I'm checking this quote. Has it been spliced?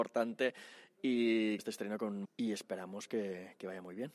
yes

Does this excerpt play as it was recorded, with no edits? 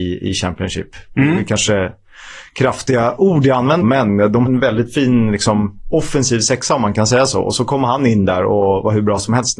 no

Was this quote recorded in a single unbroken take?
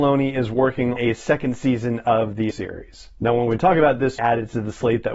no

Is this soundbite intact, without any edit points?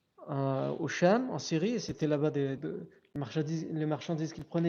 no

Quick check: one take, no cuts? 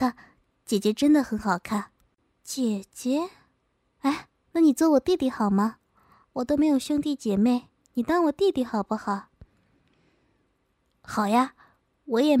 yes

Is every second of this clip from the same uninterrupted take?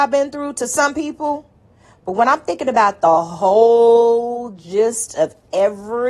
yes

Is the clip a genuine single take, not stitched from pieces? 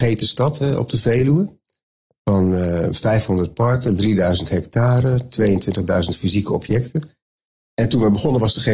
yes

